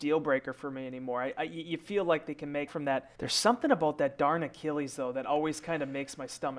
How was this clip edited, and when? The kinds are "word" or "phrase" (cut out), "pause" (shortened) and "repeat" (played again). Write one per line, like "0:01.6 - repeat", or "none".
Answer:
0:02.7 - phrase
0:03.1 - pause